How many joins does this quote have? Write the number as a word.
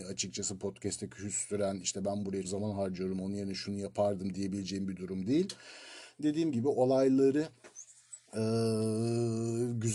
two